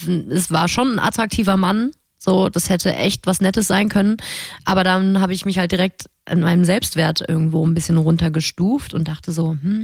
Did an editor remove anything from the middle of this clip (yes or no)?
no